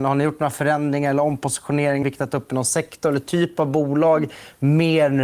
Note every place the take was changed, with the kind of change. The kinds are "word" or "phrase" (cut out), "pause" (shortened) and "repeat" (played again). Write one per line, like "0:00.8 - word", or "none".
0:02.0 - word